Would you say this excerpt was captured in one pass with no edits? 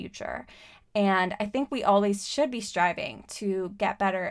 yes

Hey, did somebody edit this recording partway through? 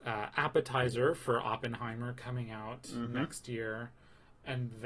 no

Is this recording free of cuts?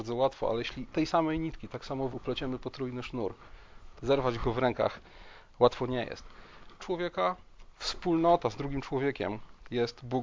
no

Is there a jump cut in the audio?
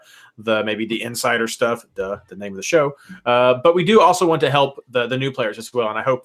no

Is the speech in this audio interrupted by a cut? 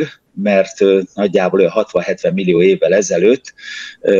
no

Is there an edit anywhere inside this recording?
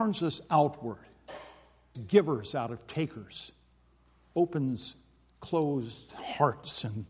yes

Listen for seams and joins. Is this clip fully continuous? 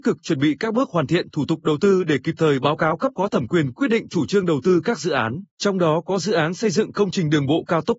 no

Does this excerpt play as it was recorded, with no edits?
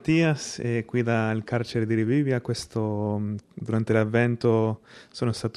yes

